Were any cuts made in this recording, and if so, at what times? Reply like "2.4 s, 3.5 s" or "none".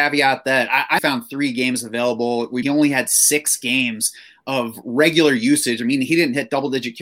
1.0 s, 2.6 s